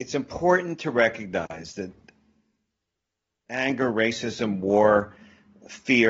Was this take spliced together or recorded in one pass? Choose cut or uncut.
uncut